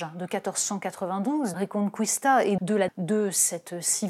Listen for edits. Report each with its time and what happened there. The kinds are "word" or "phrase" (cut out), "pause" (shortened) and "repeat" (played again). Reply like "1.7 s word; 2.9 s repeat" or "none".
1.5 s word; 2.6 s word; 2.9 s word

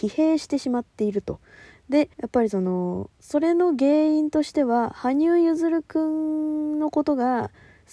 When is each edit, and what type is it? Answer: 2.1 s pause; 3.1 s pause

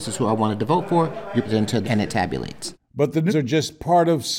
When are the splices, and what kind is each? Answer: 1.4 s word; 1.8 s phrase; 3.3 s word

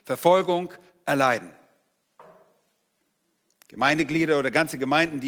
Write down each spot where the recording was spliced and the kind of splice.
none

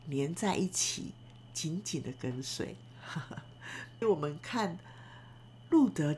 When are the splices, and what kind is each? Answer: 4.0 s phrase

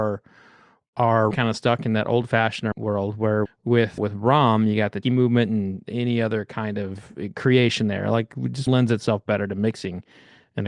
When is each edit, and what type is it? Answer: 1.3 s word; 2.7 s word; 3.5 s word; 4.0 s word; 5.0 s word; 8.7 s word

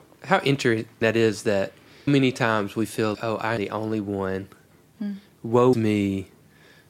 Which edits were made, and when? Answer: 1.0 s word; 2.1 s word; 3.1 s word; 3.6 s word; 5.7 s word

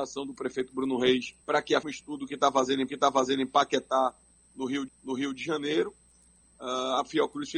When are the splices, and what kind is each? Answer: 1.4 s pause; 1.8 s phrase; 2.9 s repeat; 4.9 s repeat

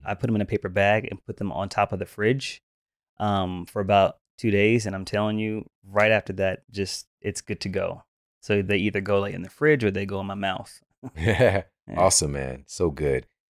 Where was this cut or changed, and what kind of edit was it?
none

